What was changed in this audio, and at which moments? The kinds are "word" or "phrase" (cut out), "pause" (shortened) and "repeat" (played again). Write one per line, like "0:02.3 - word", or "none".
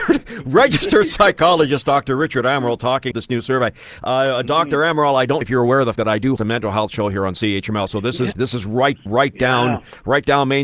0:03.1 - word
0:05.4 - word
0:06.0 - word
0:06.4 - word
0:08.3 - word
0:09.1 - word